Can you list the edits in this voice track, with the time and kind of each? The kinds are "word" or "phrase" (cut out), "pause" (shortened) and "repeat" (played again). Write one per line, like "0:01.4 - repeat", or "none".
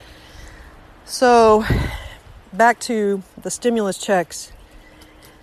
none